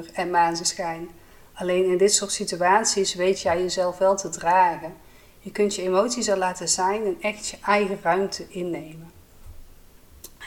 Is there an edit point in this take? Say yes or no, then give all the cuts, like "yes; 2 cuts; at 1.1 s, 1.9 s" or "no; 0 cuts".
no; 0 cuts